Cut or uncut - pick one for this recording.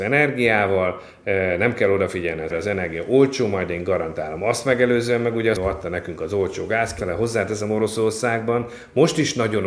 cut